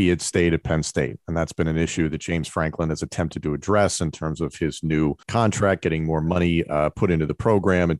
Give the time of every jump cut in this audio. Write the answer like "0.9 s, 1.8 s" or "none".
5.2 s